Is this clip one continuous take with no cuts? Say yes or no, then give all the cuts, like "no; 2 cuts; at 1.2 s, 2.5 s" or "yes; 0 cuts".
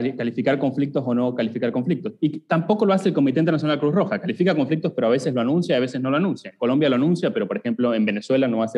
yes; 0 cuts